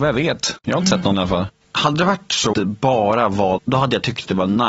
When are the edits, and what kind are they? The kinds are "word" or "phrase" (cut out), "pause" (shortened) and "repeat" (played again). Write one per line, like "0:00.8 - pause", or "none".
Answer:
0:01.1 - word
0:02.5 - word
0:03.6 - word